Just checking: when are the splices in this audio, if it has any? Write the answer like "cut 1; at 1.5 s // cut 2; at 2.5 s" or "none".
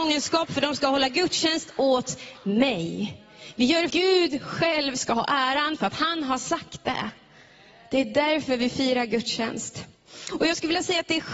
cut 1; at 3.9 s